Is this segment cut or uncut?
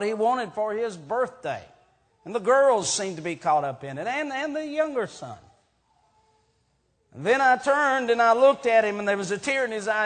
uncut